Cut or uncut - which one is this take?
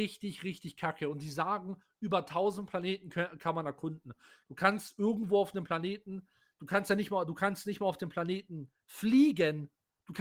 uncut